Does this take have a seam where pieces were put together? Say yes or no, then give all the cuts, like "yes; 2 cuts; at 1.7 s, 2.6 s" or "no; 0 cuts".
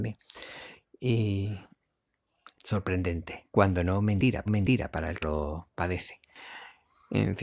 yes; 4 cuts; at 2.5 s, 3.5 s, 4.5 s, 5.2 s